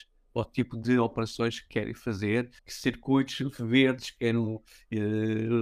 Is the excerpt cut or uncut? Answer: cut